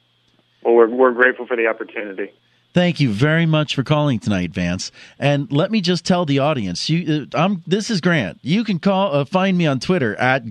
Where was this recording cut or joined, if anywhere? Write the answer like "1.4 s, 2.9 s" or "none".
none